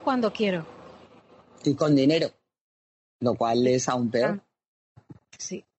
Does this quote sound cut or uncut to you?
uncut